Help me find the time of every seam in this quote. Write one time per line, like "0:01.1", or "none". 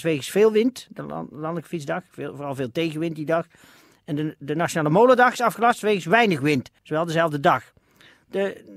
0:06.8